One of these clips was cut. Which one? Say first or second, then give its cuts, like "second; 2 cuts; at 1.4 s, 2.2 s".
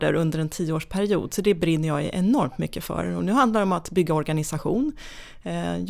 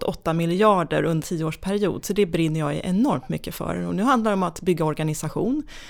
second; 1 cut; at 1.2 s